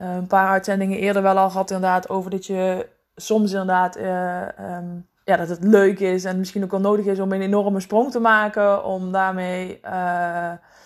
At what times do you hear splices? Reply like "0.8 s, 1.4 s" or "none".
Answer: 5.2 s